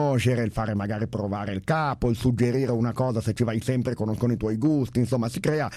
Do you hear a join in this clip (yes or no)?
no